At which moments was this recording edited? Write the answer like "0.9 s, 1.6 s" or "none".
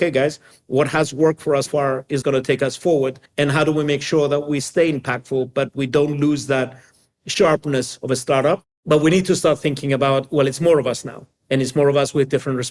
1.7 s, 2.2 s, 3.2 s